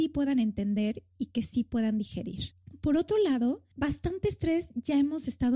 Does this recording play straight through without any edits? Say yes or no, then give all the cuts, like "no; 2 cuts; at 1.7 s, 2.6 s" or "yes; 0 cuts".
no; 1 cut; at 3.7 s